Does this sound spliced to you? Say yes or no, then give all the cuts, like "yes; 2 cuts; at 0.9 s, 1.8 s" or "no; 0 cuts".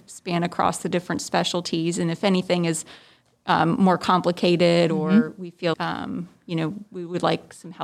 yes; 1 cut; at 5.7 s